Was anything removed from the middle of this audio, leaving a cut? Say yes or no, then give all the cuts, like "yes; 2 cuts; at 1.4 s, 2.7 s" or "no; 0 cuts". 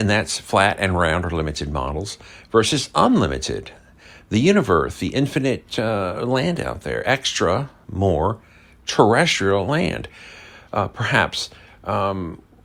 no; 0 cuts